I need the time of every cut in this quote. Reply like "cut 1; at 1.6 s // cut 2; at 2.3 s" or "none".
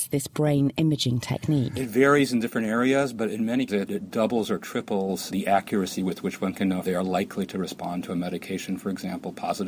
cut 1; at 3.7 s // cut 2; at 6.8 s